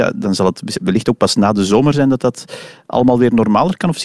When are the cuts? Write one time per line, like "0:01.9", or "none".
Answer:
none